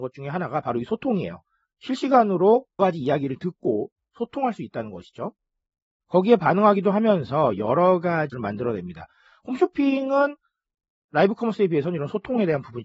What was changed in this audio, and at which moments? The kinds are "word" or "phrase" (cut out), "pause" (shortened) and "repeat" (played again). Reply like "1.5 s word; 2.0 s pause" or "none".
2.8 s word; 8.3 s word